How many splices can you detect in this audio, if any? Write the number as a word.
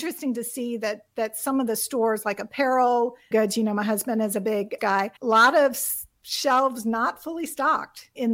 three